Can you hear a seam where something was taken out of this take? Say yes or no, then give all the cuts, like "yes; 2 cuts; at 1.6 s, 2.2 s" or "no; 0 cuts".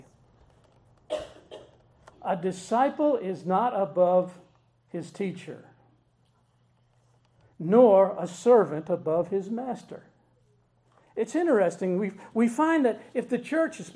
no; 0 cuts